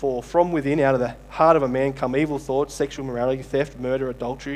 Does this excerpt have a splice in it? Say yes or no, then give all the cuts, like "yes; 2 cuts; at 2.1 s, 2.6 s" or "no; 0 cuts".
no; 0 cuts